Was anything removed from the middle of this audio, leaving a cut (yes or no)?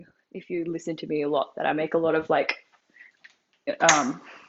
no